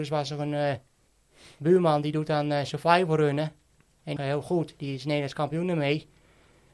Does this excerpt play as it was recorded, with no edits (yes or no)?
no